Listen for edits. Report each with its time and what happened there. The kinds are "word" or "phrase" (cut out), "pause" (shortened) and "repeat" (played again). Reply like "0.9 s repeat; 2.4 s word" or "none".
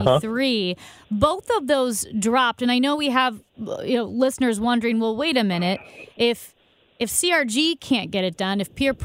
none